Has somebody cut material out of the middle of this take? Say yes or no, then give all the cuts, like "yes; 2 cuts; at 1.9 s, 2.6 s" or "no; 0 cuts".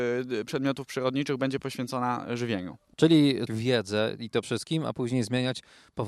yes; 2 cuts; at 3.5 s, 4.4 s